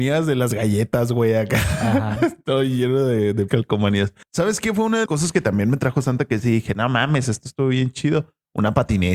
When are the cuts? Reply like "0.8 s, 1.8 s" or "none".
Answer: 3.5 s, 4.2 s, 5.1 s

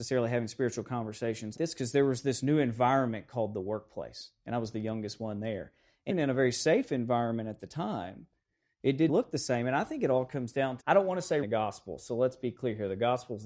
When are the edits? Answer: 1.6 s, 6.1 s, 9.1 s, 10.8 s, 11.4 s

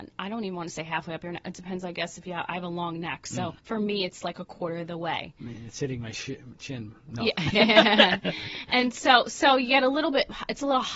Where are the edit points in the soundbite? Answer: 3.6 s

